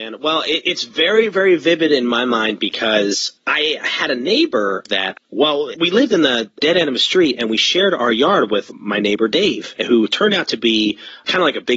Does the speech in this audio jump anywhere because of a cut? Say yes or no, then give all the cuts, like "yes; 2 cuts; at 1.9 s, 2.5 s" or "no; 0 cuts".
yes; 2 cuts; at 3.4 s, 5.2 s